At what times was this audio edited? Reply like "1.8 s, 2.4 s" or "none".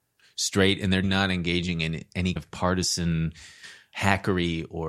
1.0 s, 2.4 s, 3.9 s